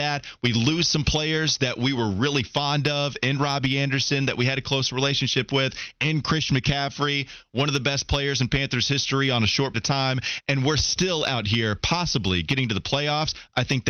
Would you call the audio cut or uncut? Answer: cut